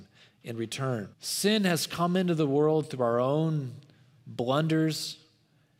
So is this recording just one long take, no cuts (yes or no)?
no